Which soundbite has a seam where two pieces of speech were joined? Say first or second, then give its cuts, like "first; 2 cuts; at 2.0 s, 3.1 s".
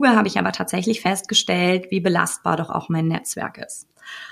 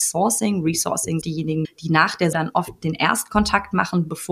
second; 3 cuts; at 1.2 s, 1.6 s, 2.3 s